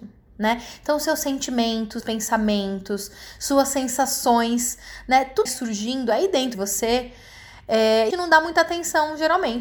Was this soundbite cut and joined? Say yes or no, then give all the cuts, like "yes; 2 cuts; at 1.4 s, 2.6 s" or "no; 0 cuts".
yes; 4 cuts; at 2.0 s, 5.5 s, 6.5 s, 8.1 s